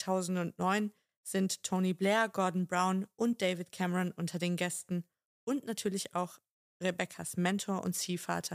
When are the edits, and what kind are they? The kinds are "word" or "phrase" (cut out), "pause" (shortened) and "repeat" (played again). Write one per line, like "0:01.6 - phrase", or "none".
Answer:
none